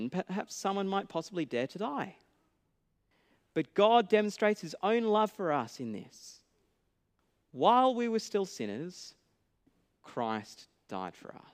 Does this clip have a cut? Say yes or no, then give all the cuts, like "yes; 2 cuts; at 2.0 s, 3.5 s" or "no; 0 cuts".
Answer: no; 0 cuts